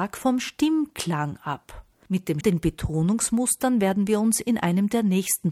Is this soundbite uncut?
no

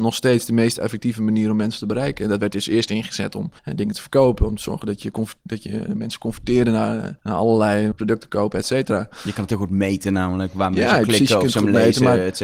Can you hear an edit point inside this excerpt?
yes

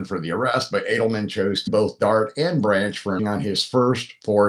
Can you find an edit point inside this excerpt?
yes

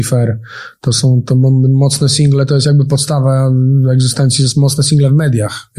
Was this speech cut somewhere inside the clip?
no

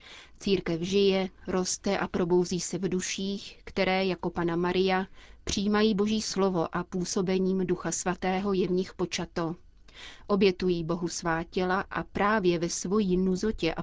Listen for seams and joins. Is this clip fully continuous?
yes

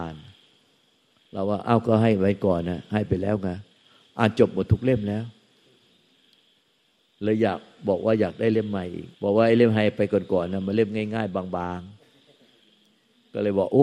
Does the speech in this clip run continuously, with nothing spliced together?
no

